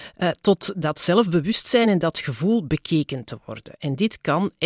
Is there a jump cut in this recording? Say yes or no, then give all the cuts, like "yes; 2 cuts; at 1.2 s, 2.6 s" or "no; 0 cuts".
no; 0 cuts